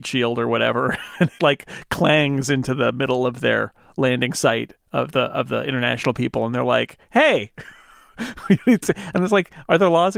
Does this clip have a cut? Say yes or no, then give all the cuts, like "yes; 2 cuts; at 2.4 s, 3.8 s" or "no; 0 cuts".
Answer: yes; 1 cut; at 1.4 s